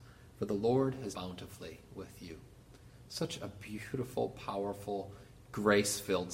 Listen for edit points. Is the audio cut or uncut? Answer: cut